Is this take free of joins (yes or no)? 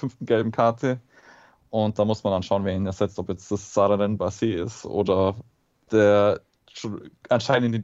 yes